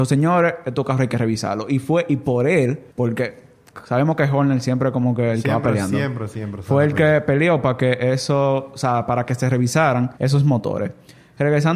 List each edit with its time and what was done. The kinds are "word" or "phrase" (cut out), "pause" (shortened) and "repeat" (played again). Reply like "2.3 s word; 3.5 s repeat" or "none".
2.9 s pause; 10.2 s pause

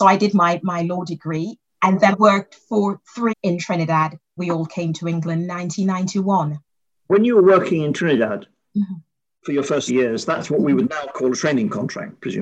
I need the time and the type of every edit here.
2.1 s word; 3.3 s word; 4.4 s word; 9.9 s word

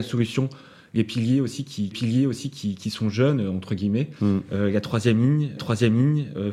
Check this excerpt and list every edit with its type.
1.9 s repeat; 5.6 s repeat

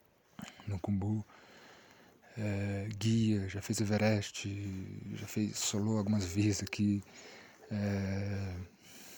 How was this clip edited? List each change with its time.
none

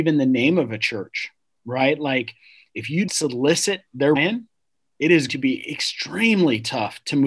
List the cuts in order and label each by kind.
3.1 s word; 4.2 s word; 5.3 s word

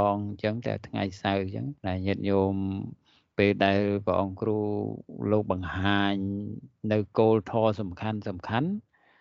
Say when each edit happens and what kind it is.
1.8 s pause

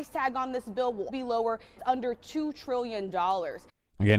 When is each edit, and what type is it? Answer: 1.1 s word; 1.8 s word

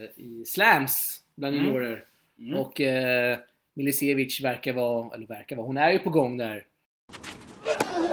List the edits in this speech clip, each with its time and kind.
none

